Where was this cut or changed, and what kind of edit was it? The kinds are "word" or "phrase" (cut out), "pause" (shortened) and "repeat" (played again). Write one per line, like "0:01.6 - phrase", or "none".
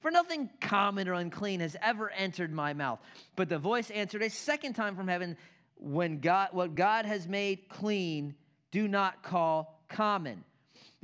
none